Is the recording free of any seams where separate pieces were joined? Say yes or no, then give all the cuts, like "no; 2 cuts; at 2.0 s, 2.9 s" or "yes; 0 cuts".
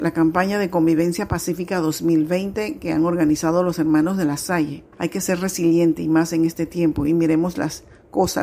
no; 1 cut; at 4.9 s